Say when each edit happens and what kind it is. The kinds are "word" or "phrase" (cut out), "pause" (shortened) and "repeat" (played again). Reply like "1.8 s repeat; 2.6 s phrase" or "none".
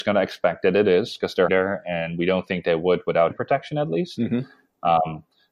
1.5 s word; 3.3 s phrase

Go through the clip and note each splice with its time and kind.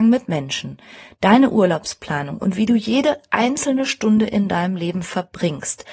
none

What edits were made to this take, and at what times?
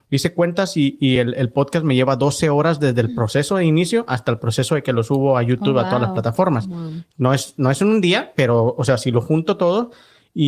none

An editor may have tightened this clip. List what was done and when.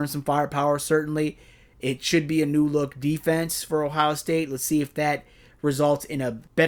none

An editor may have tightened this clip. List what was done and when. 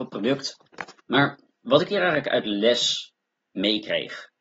1.0 s pause; 3.4 s pause

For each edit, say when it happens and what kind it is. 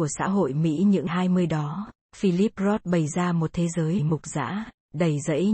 1.1 s phrase; 4.0 s phrase

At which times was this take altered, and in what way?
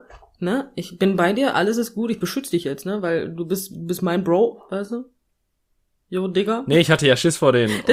none

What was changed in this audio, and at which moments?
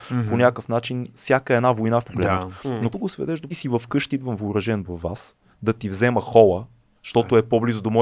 2.0 s phrase; 2.9 s word; 3.5 s phrase; 4.1 s word

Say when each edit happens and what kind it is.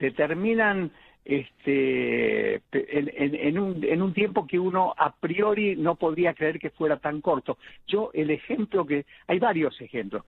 3.1 s word

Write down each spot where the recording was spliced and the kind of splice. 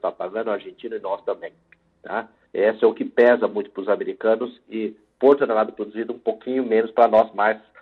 none

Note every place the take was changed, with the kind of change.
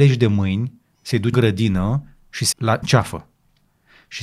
1.3 s word; 2.5 s word; 2.8 s word

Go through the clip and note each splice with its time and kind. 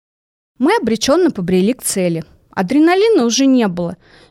none

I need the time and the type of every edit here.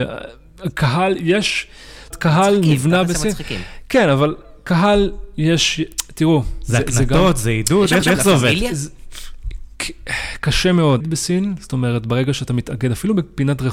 2.1 s word; 8.0 s repeat; 11.0 s phrase

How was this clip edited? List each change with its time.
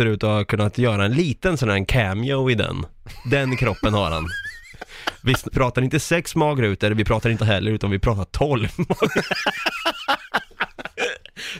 5.5 s word; 7.4 s word

